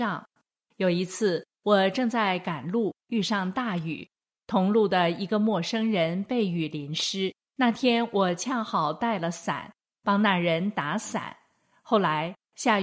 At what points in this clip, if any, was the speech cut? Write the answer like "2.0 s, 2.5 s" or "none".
7.4 s